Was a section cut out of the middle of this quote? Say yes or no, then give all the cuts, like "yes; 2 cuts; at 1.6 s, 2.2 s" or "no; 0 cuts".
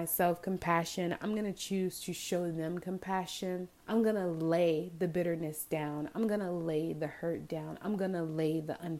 yes; 1 cut; at 3.8 s